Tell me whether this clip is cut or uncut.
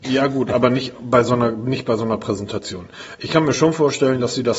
uncut